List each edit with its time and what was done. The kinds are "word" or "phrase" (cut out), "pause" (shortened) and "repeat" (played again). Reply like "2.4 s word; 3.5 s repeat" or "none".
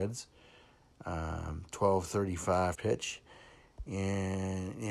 2.7 s word